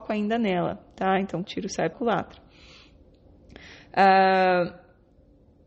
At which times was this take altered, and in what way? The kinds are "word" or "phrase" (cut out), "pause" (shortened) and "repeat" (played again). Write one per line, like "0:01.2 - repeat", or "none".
0:01.4 - word
0:01.9 - word